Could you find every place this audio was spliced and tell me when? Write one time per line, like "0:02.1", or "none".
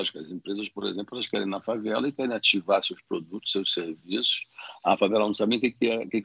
none